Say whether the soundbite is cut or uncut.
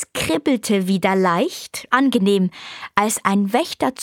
cut